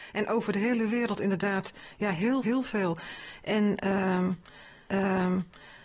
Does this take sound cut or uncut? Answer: cut